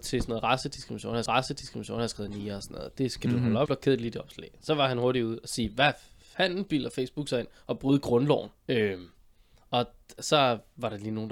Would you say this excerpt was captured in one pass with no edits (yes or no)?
no